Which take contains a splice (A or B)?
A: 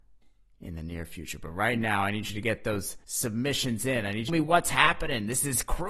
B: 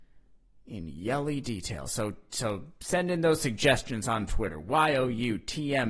A